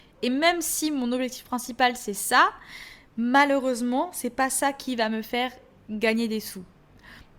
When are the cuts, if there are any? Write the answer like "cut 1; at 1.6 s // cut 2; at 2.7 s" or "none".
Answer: none